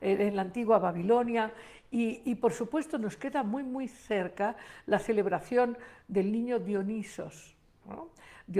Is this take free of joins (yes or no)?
yes